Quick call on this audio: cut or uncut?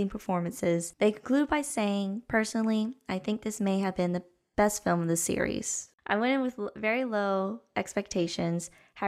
uncut